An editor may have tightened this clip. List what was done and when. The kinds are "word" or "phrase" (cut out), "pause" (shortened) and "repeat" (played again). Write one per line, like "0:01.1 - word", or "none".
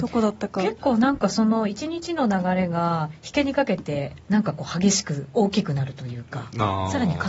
0:04.2 - pause

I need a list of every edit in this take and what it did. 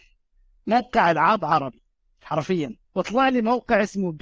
0:02.8 - pause

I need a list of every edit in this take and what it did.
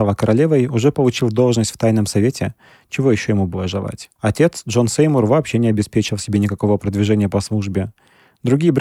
0:04.2 - pause

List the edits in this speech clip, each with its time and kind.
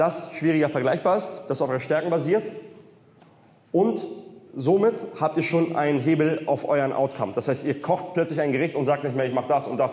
0:04.5 - pause

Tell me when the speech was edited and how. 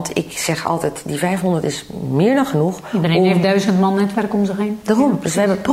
none

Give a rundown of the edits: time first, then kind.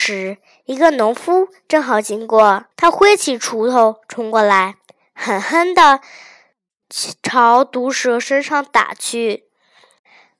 0:02.7 - pause

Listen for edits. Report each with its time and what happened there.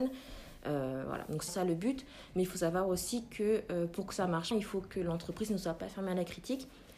0:01.5 - word
0:04.5 - word

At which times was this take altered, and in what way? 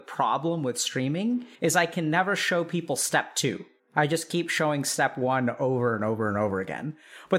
0:01.5 - pause
0:03.8 - pause

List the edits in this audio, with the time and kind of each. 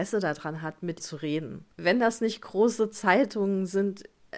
0:01.0 - word
0:01.7 - pause

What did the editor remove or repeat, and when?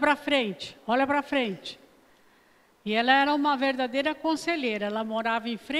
none

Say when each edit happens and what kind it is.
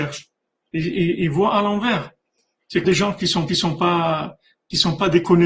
0:02.8 - word
0:03.5 - repeat

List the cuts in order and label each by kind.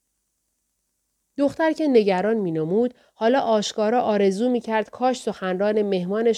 none

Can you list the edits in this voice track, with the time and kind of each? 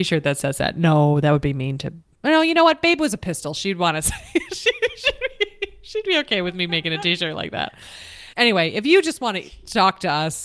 0:08.3 - pause

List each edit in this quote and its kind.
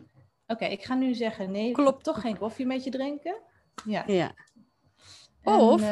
none

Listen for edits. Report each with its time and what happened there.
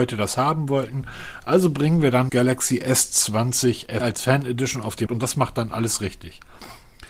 0:02.3 - word
0:04.0 - word
0:05.1 - word

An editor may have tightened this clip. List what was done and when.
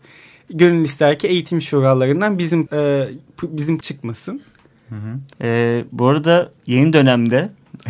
0:02.7 - word
0:03.8 - word
0:05.3 - pause

